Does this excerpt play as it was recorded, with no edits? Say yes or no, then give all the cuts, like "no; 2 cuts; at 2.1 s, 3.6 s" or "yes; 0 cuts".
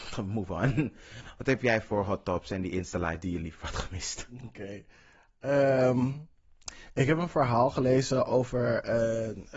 yes; 0 cuts